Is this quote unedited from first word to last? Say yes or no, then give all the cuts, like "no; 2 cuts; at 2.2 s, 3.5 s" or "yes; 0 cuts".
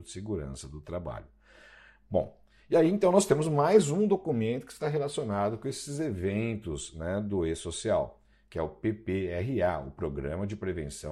yes; 0 cuts